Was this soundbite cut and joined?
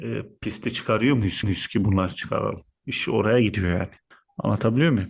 yes; 2 cuts; at 1.4 s, 4.1 s

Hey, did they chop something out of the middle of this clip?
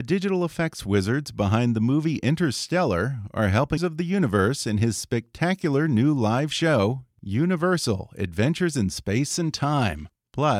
yes; 1 cut; at 3.8 s

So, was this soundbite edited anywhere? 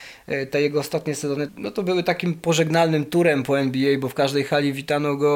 yes; 1 cut; at 1.5 s

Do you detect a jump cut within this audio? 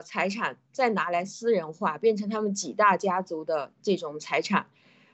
no; 0 cuts

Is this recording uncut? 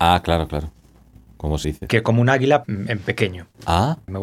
no; 2 cuts; at 1.6 s, 2.6 s

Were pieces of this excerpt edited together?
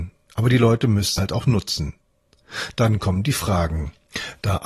yes; 1 cut; at 1.2 s

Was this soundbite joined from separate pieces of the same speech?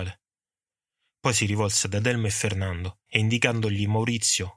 yes; 1 cut; at 3.1 s

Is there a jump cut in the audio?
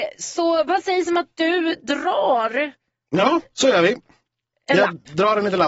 no; 0 cuts

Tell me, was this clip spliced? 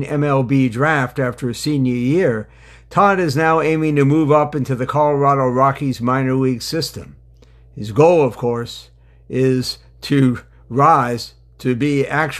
no; 0 cuts

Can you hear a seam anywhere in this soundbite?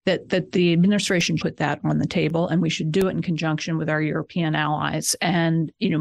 yes; 1 cut; at 1.4 s

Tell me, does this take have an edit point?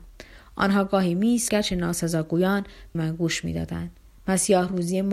yes; 2 cuts; at 1.5 s, 2.9 s

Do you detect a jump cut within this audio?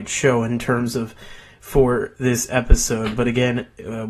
no; 0 cuts

